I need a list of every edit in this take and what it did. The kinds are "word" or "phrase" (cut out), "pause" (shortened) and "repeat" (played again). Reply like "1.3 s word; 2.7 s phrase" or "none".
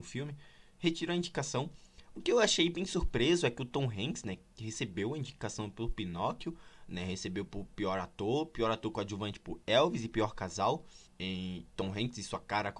11.1 s pause